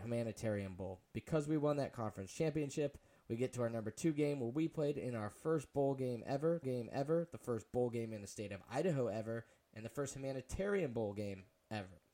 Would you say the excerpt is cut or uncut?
cut